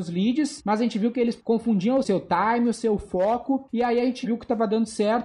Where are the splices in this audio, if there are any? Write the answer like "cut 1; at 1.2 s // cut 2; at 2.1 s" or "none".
cut 1; at 4.2 s